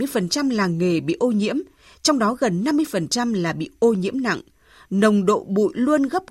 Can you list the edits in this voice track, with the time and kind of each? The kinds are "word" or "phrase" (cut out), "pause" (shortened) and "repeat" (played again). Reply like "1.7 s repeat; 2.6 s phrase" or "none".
none